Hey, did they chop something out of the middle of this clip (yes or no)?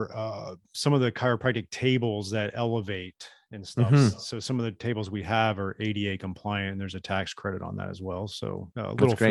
no